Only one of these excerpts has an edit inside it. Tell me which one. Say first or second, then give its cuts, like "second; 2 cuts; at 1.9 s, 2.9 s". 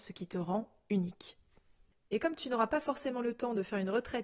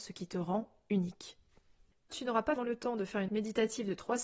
second; 3 cuts; at 2.1 s, 2.6 s, 3.3 s